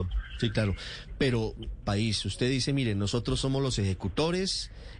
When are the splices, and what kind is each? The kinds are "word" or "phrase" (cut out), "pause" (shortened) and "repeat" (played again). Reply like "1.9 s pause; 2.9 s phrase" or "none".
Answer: 1.8 s phrase